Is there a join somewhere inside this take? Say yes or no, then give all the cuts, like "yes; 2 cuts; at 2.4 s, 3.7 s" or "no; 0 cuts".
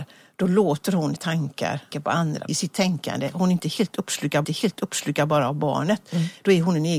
yes; 4 cuts; at 1.2 s, 1.9 s, 2.5 s, 4.4 s